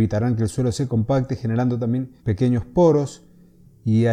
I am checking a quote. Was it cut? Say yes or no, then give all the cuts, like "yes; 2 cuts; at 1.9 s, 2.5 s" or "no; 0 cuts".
yes; 1 cut; at 2.2 s